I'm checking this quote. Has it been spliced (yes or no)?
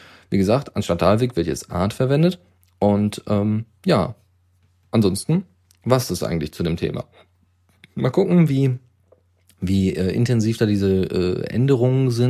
no